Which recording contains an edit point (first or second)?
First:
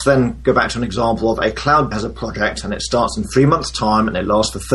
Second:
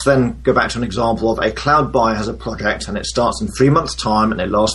first